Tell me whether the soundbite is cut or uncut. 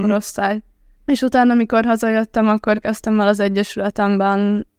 uncut